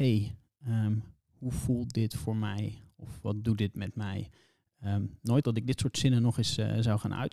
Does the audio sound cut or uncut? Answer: cut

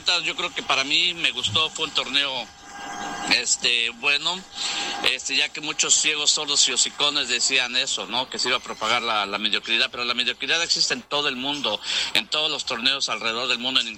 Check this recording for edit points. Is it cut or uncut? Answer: uncut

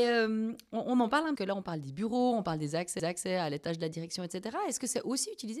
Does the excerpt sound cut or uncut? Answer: cut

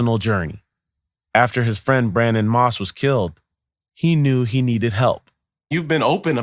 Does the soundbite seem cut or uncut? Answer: uncut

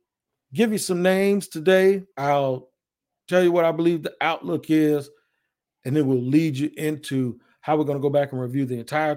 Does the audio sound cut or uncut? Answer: cut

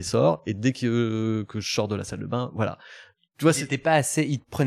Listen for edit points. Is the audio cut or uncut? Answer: uncut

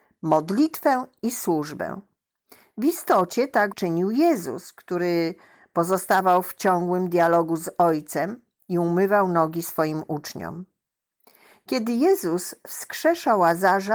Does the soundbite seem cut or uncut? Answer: cut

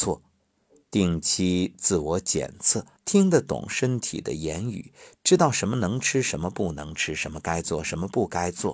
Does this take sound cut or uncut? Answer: cut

